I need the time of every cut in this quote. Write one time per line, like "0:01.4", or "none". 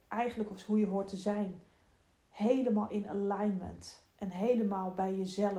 none